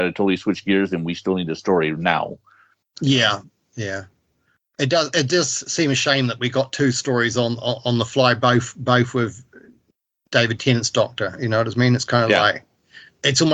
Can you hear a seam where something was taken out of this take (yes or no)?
no